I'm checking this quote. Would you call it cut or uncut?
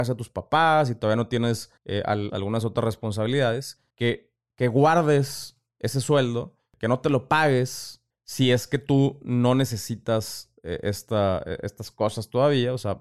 cut